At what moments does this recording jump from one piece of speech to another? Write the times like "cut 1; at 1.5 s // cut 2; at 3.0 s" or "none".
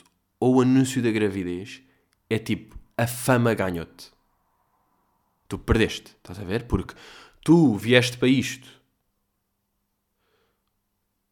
none